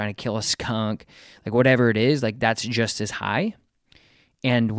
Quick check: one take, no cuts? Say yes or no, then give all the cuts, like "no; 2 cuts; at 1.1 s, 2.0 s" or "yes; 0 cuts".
yes; 0 cuts